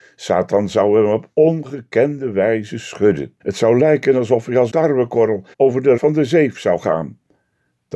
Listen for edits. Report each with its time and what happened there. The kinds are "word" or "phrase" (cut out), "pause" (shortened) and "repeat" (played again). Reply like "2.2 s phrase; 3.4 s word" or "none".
3.4 s pause; 4.7 s word; 5.5 s pause; 6.0 s word